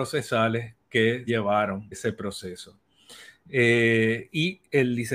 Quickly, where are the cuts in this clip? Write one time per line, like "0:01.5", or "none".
0:01.3
0:01.9